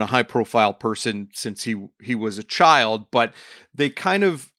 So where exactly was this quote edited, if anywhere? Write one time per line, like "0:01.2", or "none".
none